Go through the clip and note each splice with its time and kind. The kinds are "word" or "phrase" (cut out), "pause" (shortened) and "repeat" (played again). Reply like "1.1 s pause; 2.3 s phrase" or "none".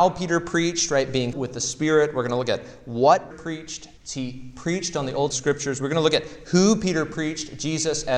1.3 s word; 3.3 s word; 4.0 s pause; 5.3 s word